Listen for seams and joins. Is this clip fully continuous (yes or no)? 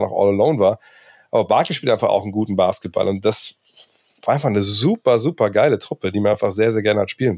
yes